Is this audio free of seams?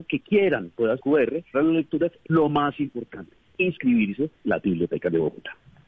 no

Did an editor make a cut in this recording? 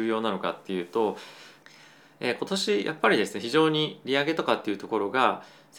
no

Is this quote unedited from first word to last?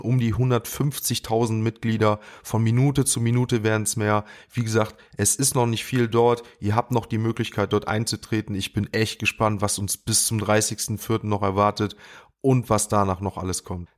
yes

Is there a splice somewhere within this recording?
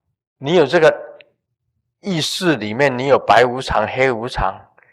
no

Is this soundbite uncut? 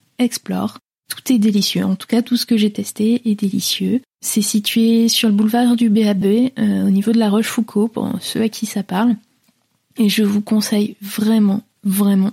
yes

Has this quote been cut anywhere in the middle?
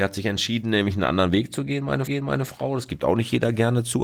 yes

